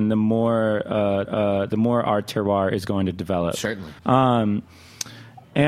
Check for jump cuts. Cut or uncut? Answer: cut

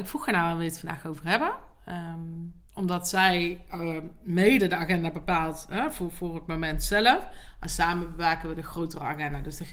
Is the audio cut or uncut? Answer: cut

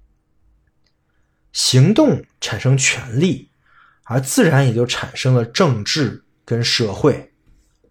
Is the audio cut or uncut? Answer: uncut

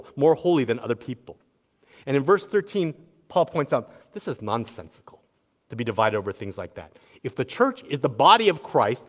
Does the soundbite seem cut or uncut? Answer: uncut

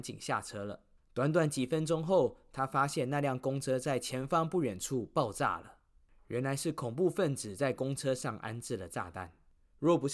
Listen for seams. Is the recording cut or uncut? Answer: cut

